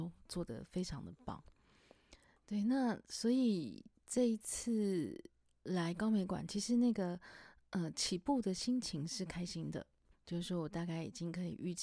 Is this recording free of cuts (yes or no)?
no